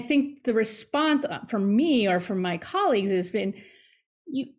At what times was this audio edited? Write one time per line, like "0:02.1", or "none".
none